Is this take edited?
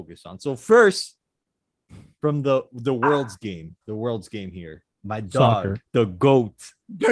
yes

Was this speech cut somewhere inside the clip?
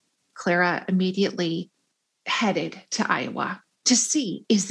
no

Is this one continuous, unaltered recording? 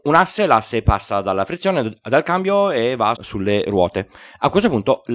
no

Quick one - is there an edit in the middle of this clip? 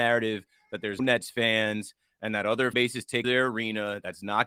yes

